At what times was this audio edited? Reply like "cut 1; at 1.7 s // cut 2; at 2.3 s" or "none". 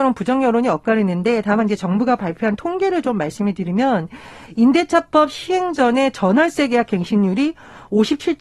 none